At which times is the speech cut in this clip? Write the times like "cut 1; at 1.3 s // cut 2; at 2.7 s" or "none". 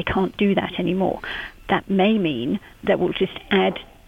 cut 1; at 2.7 s